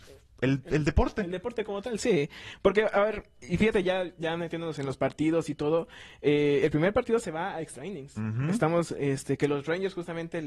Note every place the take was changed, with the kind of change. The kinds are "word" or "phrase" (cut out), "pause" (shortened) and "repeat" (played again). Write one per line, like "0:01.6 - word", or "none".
none